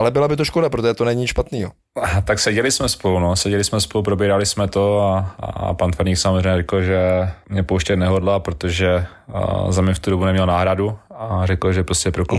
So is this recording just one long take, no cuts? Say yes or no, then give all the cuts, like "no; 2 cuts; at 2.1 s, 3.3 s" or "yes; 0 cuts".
yes; 0 cuts